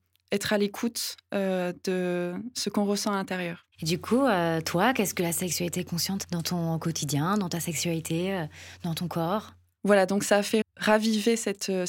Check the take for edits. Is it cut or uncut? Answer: cut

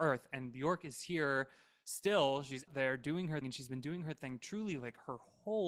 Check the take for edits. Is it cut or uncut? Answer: cut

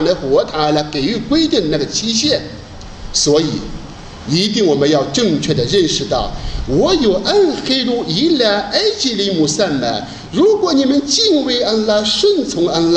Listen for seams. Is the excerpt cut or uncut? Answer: uncut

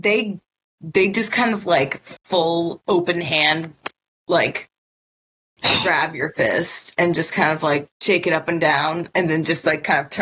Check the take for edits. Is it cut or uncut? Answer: cut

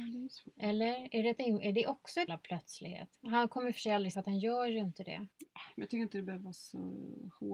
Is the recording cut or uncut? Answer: cut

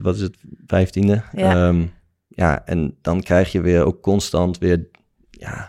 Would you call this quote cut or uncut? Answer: uncut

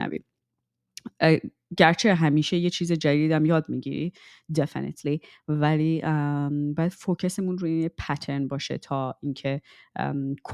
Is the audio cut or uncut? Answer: uncut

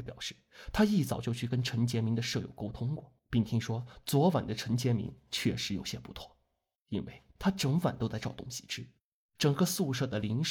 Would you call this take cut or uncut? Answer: cut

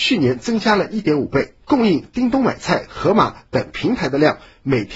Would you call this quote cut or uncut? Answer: cut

